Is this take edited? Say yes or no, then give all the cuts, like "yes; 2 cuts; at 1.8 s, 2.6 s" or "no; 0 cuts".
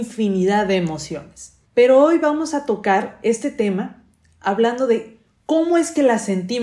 yes; 1 cut; at 1.6 s